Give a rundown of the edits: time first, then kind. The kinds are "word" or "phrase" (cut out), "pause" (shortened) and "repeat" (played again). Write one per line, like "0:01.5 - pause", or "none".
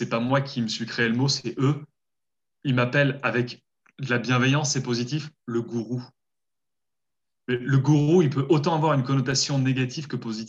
none

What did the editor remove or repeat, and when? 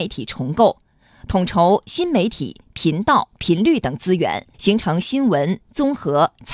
0:04.5 - pause

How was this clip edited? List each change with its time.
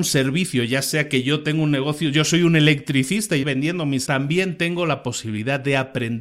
0:03.4 - word
0:04.1 - word

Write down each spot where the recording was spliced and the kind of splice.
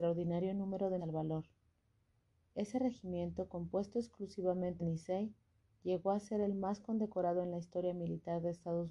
0:01.0 - word
0:04.8 - word

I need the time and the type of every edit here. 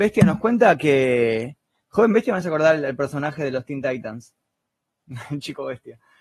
none

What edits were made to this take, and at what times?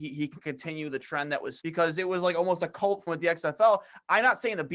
0:01.6 - word
0:03.1 - word

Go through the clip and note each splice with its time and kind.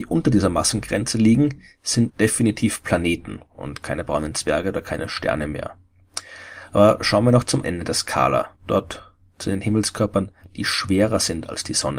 0:02.1 - word
0:03.5 - pause
0:07.6 - word
0:08.6 - pause

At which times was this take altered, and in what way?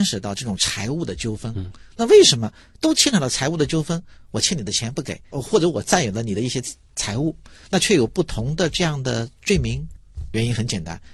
none

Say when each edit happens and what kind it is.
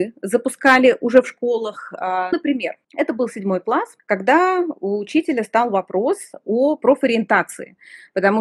0:02.3 - word
0:02.8 - pause
0:04.0 - pause

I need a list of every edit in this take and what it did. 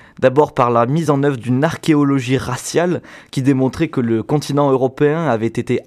none

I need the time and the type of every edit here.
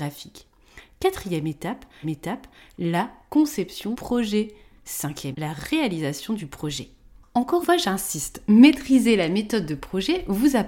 0:02.0 - repeat
0:03.9 - word
0:05.3 - word
0:07.6 - word

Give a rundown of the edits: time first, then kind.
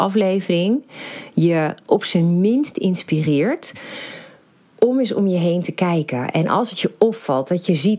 none

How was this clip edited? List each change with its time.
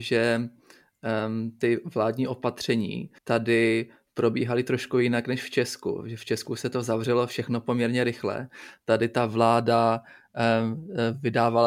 0:03.2 - pause

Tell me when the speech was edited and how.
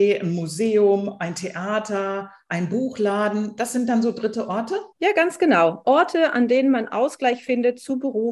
0:04.9 - pause

